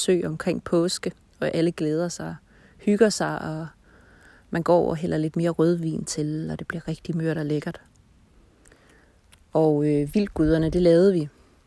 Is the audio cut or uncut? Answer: uncut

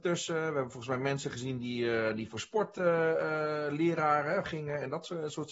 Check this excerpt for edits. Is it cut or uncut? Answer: cut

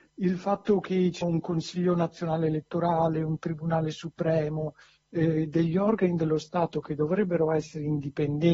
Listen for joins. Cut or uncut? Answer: cut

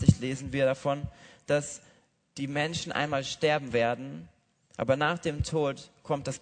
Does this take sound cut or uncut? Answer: uncut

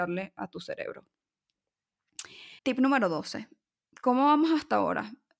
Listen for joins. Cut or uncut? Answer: cut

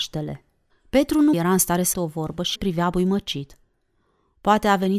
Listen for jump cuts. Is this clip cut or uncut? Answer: cut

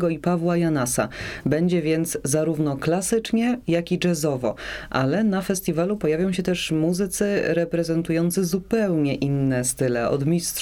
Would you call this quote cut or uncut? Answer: uncut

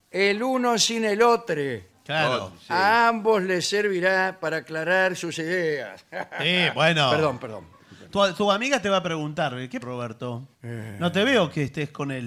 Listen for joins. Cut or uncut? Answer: cut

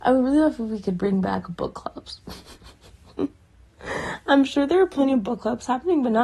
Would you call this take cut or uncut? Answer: uncut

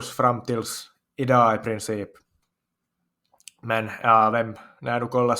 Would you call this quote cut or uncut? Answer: uncut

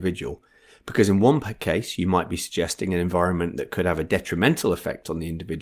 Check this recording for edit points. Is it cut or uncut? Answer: uncut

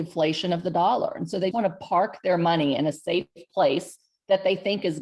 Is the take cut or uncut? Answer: cut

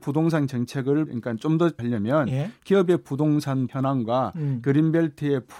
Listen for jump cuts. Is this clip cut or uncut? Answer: cut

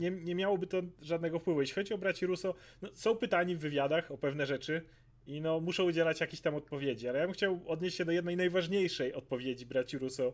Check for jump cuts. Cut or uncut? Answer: uncut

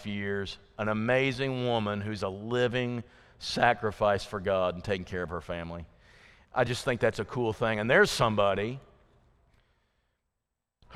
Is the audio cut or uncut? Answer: uncut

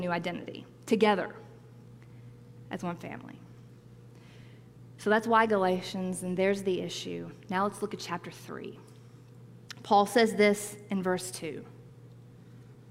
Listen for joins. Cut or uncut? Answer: uncut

